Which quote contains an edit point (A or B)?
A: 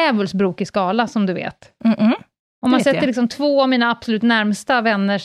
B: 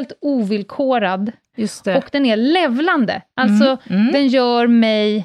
A